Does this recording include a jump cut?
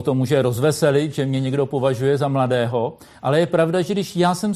no; 0 cuts

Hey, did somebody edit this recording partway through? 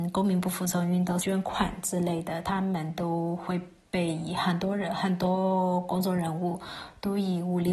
yes; 1 cut; at 1.2 s

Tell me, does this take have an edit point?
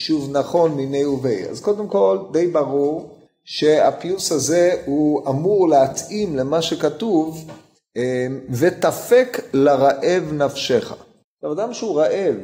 no; 0 cuts

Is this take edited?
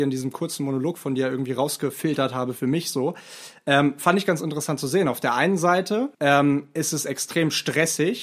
yes; 1 cut; at 6.1 s

